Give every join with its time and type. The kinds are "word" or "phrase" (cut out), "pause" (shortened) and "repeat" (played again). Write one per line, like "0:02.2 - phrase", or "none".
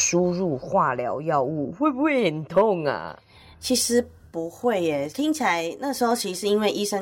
0:05.1 - word